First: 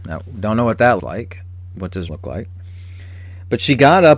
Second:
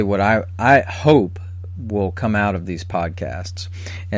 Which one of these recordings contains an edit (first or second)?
first